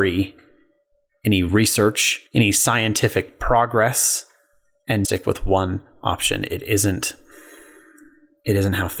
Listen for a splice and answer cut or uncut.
cut